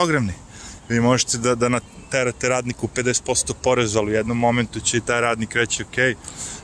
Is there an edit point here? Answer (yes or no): no